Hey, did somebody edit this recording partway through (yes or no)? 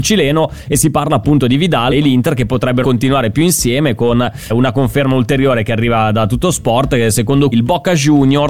yes